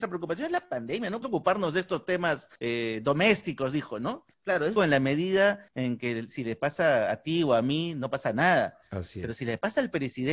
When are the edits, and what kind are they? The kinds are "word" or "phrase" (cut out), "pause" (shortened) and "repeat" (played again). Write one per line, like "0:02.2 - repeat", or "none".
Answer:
0:01.2 - word
0:02.6 - pause
0:04.3 - pause
0:04.8 - word
0:05.7 - pause